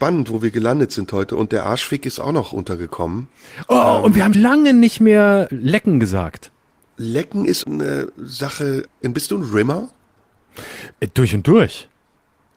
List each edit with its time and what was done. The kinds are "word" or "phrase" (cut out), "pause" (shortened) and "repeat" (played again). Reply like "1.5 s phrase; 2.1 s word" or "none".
2.2 s word; 4.3 s word; 5.5 s word; 6.7 s pause; 7.6 s word; 8.9 s word